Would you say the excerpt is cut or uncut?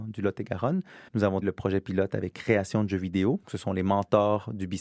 cut